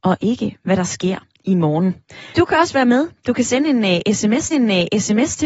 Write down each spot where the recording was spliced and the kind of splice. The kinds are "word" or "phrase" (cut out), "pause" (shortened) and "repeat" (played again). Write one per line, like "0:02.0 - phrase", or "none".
0:02.3 - pause
0:04.5 - repeat

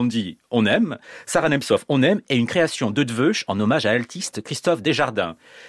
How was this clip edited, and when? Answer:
none

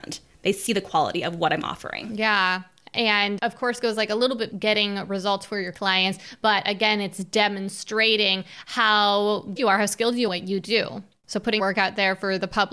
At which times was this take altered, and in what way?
0:03.4 - word
0:04.5 - word
0:05.7 - word
0:09.6 - word
0:10.3 - word
0:11.6 - word

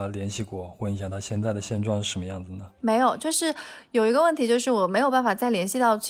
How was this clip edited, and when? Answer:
0:02.8 - pause

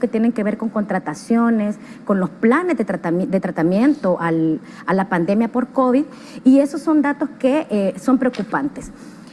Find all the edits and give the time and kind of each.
none

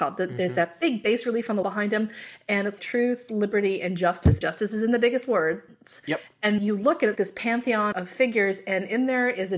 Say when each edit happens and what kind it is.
0:01.6 - word
0:02.8 - word
0:04.4 - word
0:06.6 - word
0:07.2 - word
0:07.9 - word

